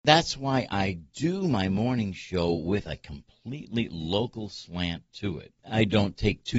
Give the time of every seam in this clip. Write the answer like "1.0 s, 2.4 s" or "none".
none